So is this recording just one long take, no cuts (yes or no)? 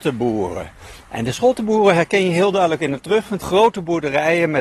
no